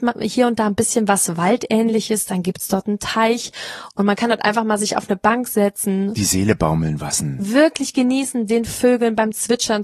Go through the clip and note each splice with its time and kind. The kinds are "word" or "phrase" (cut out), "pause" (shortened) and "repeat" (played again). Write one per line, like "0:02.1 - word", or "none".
none